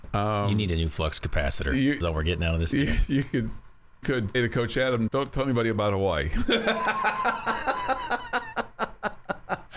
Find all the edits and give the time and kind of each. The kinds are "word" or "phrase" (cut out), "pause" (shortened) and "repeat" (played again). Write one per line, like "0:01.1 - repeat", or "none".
0:02.0 - phrase
0:04.0 - word
0:04.3 - word
0:05.1 - word